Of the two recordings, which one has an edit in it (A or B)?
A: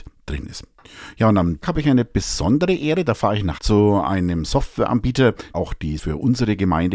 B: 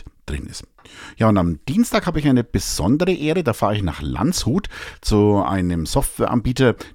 A